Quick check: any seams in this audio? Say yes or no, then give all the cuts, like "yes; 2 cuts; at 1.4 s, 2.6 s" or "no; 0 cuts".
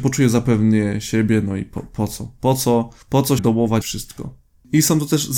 yes; 3 cuts; at 3.0 s, 3.4 s, 3.8 s